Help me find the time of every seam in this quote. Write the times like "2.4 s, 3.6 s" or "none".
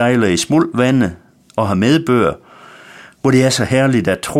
none